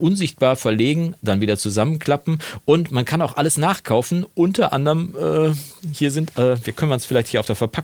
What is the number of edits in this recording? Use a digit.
0